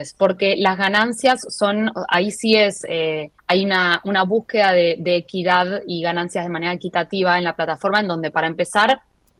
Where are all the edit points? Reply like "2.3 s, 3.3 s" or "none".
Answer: 3.4 s